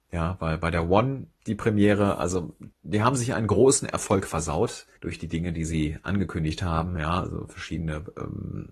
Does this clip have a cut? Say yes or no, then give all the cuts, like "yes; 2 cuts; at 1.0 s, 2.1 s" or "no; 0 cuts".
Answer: yes; 3 cuts; at 1.3 s, 2.7 s, 5.0 s